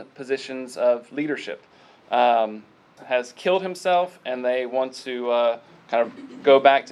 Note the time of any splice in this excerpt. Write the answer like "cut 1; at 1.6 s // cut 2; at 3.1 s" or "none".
cut 1; at 3.0 s